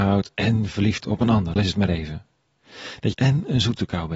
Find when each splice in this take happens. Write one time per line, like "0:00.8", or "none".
0:01.0
0:01.6
0:03.1